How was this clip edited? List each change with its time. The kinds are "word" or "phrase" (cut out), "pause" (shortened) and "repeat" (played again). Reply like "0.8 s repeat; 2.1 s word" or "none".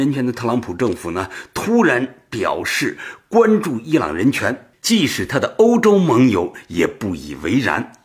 none

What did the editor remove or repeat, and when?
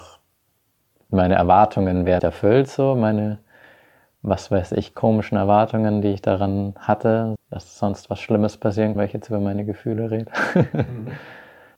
2.2 s word; 4.9 s word; 7.3 s word; 8.9 s word

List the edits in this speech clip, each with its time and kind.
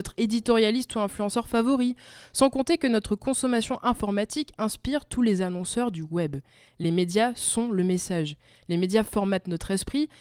none

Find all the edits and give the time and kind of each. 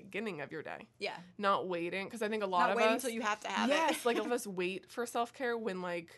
4.2 s word

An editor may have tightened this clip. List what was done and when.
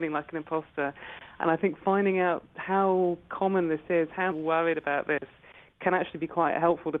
4.3 s phrase

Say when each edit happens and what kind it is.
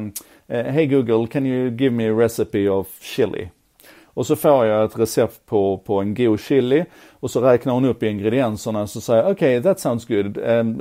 none

